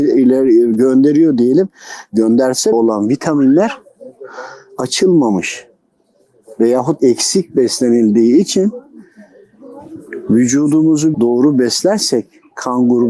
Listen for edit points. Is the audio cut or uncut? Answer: cut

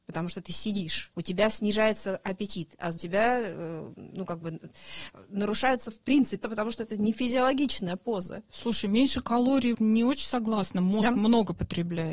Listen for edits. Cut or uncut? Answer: cut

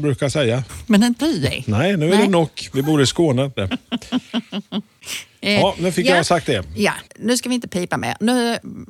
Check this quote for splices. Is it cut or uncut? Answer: cut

